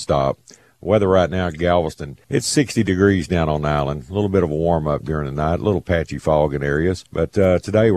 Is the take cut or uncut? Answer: cut